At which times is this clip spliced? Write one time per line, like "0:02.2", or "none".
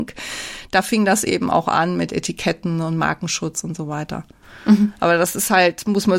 none